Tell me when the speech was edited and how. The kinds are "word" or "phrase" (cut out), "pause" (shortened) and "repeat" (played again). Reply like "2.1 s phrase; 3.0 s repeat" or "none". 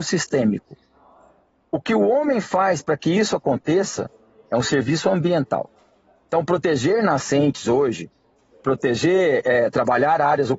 none